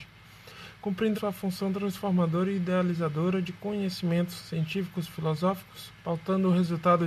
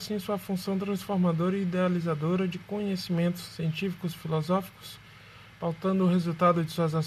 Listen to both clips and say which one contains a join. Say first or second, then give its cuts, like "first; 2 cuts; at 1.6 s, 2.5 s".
first; 2 cuts; at 1.1 s, 6.0 s